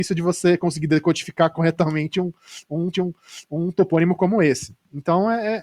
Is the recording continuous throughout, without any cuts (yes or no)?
no